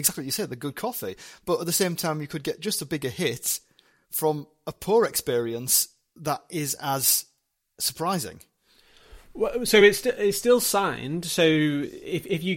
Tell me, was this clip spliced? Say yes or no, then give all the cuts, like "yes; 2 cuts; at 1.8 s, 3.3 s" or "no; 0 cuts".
no; 0 cuts